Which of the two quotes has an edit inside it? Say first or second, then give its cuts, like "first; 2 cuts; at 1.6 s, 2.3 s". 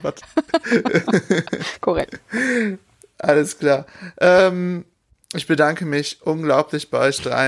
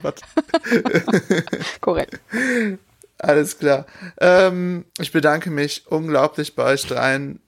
second; 1 cut; at 4.9 s